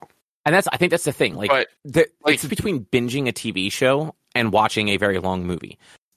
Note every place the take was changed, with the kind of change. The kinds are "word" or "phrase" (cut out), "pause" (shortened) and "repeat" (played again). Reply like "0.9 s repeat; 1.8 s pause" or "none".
1.8 s pause; 2.5 s word